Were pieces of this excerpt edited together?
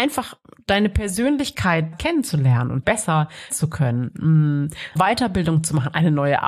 yes; 4 cuts; at 1.9 s, 2.8 s, 3.5 s, 5.0 s

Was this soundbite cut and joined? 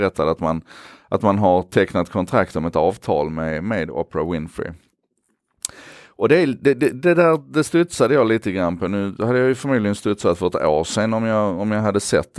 no; 0 cuts

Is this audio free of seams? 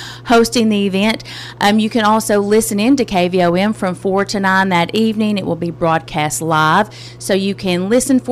yes; 0 cuts

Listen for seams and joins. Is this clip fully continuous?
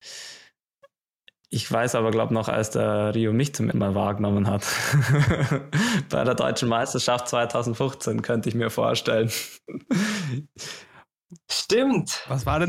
no; 1 cut; at 3.7 s

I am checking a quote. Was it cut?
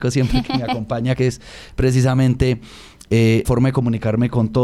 yes; 2 cuts; at 1.1 s, 3.4 s

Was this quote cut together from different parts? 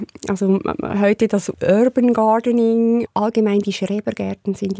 no; 0 cuts

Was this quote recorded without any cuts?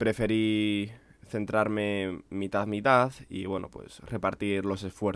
yes; 0 cuts

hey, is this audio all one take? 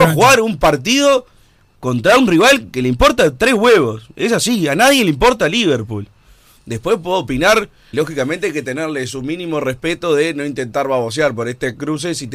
no; 2 cuts; at 2.7 s, 7.9 s

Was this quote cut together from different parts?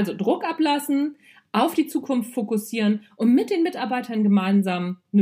no; 0 cuts

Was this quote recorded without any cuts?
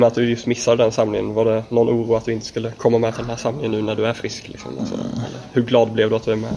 yes; 0 cuts

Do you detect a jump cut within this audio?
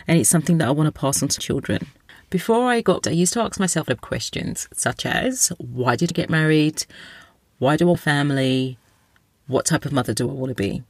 yes; 5 cuts; at 1.4 s, 3.0 s, 3.9 s, 6.1 s, 7.9 s

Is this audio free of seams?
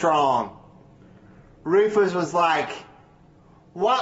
yes; 0 cuts

